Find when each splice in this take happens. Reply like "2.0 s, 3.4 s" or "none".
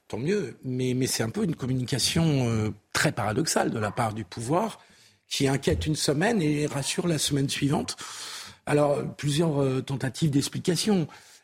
none